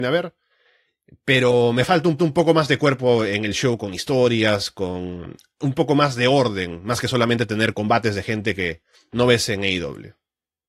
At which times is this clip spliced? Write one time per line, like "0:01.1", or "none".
0:02.2